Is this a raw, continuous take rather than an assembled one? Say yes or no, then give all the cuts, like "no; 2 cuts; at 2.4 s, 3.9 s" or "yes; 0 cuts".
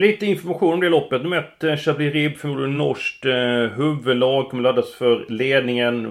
yes; 0 cuts